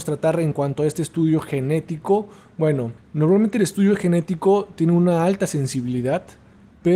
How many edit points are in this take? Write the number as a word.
one